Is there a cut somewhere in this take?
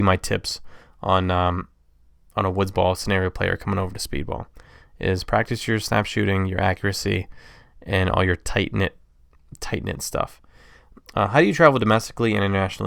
no; 0 cuts

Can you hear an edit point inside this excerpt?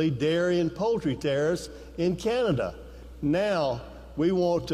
no; 0 cuts

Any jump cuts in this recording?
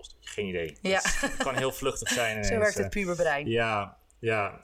no; 0 cuts

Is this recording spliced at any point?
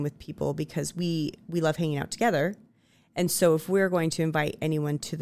no; 0 cuts

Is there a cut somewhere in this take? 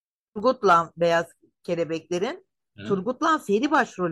no; 0 cuts

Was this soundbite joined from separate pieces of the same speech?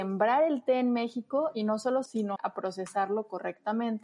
yes; 2 cuts; at 2.1 s, 2.4 s

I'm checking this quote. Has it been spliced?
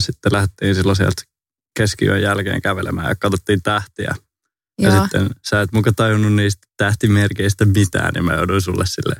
no; 0 cuts

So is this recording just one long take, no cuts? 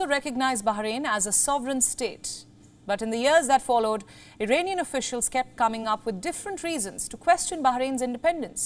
yes; 0 cuts

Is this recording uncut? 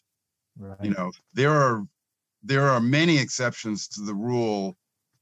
no; 1 cut; at 1.2 s

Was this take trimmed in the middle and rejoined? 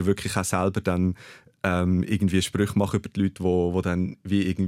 no; 0 cuts

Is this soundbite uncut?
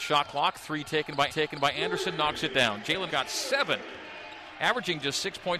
no; 2 cuts; at 1.3 s, 3.1 s

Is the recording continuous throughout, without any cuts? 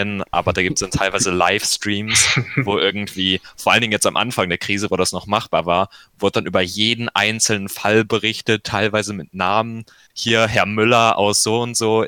yes; 0 cuts

